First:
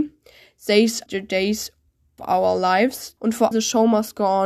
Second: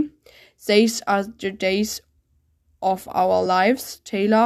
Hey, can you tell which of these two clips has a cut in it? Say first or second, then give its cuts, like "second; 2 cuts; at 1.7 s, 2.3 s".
first; 4 cuts; at 1.1 s, 2.2 s, 3.2 s, 3.5 s